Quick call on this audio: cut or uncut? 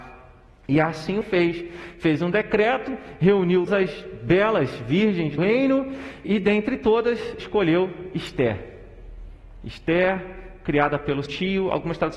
cut